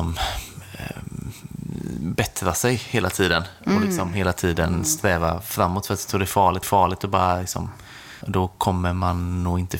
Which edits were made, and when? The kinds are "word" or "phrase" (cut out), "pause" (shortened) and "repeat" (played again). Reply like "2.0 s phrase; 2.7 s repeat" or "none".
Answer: 6.6 s repeat; 8.2 s word

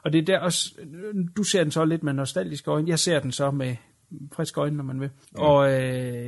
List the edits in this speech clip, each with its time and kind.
5.2 s pause

